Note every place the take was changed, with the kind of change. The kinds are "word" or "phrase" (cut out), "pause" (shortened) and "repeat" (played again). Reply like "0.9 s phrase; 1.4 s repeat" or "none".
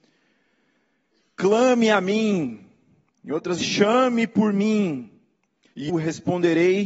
3.6 s word; 5.9 s word